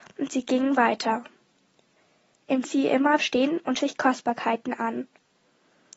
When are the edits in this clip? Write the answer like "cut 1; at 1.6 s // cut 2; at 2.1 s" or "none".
cut 1; at 2.6 s // cut 2; at 3.2 s // cut 3; at 3.8 s